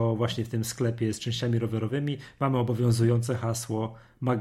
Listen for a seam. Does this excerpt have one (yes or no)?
no